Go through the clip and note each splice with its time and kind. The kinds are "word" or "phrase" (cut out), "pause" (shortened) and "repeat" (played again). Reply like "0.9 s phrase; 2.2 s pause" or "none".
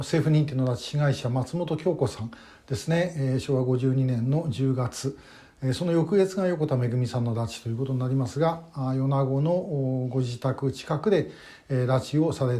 none